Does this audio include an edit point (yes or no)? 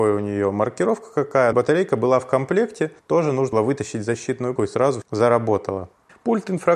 yes